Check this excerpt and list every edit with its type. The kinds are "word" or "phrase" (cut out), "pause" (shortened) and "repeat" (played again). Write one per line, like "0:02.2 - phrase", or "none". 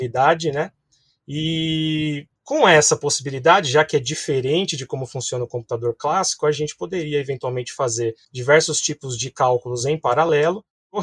0:02.4 - pause
0:08.2 - pause